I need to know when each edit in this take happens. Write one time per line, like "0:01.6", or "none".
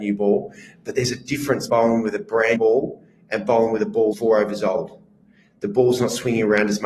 0:01.7
0:02.6
0:04.1